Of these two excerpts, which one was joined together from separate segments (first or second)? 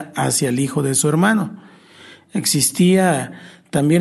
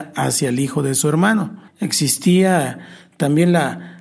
second